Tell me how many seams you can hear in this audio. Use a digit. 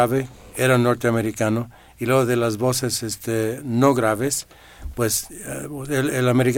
0